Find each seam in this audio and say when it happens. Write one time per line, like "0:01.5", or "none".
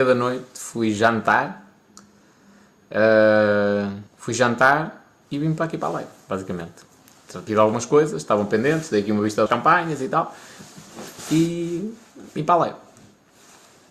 0:04.1
0:07.5
0:09.5